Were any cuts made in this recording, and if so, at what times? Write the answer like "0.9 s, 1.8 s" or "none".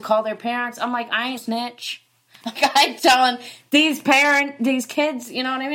1.4 s, 2.6 s